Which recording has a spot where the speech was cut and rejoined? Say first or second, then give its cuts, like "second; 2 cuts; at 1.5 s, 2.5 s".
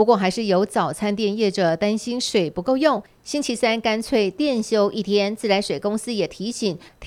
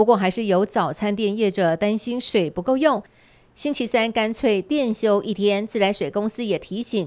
first; 1 cut; at 3.1 s